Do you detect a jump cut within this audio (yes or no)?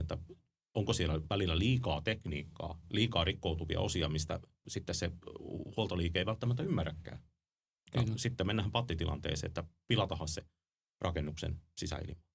no